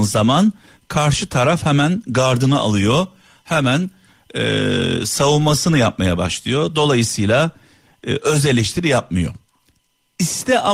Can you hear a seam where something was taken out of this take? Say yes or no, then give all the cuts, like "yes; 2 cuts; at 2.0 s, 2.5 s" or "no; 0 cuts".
no; 0 cuts